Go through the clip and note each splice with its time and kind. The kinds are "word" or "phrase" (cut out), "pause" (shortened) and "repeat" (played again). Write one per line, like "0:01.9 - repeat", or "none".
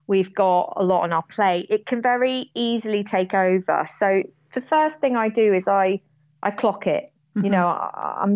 none